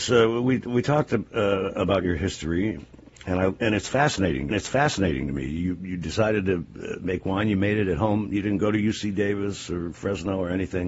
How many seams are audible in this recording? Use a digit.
1